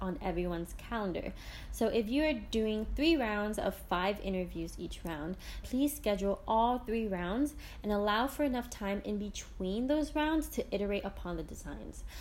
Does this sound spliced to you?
yes; 1 cut; at 5.6 s

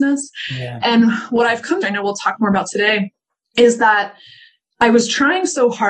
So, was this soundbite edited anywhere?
yes; 1 cut; at 1.8 s

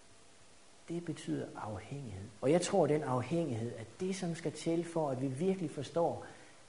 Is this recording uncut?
no; 1 cut; at 2.4 s

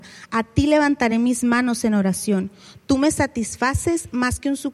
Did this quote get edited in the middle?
no; 0 cuts

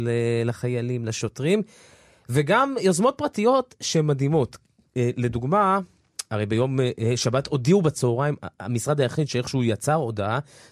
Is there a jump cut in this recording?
no; 0 cuts

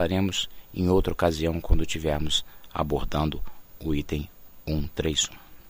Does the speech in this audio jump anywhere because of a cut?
no; 0 cuts

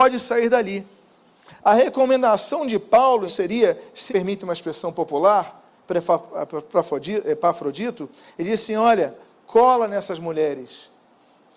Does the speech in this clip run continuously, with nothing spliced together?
no; 2 cuts; at 3.3 s, 4.1 s

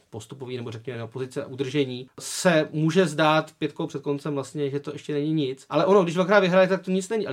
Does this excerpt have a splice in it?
no; 0 cuts

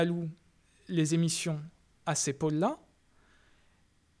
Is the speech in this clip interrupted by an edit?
no; 0 cuts

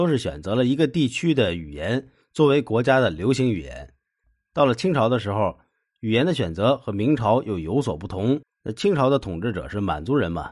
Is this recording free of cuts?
no; 1 cut; at 8.4 s

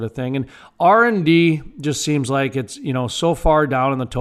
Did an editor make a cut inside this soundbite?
no; 0 cuts

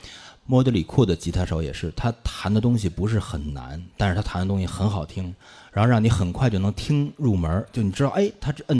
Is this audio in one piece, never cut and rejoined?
yes; 0 cuts

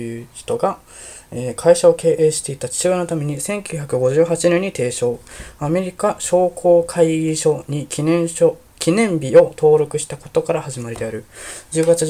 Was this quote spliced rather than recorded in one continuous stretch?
no; 0 cuts

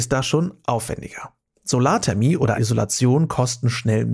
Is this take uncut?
no; 1 cut; at 2.5 s

